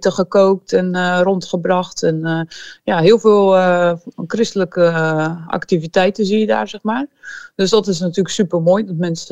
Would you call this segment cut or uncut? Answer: uncut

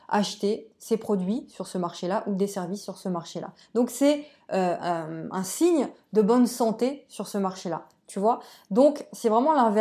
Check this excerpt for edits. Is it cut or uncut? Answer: uncut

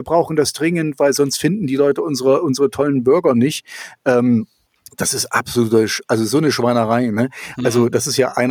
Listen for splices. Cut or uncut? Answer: cut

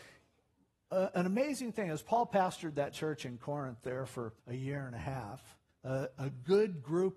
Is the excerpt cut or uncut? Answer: cut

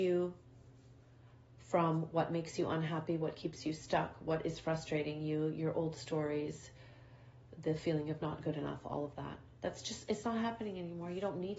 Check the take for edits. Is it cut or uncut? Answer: cut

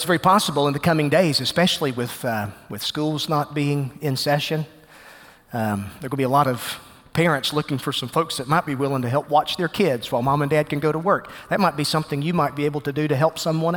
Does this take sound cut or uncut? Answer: uncut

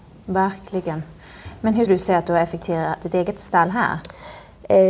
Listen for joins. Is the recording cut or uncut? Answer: cut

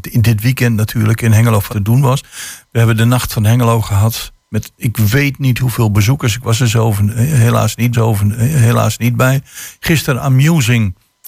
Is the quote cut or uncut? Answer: cut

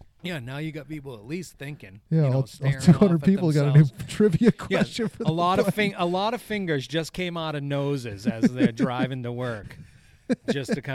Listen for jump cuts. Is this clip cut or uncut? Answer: uncut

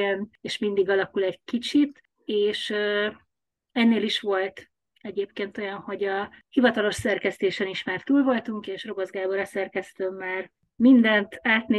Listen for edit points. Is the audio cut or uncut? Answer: uncut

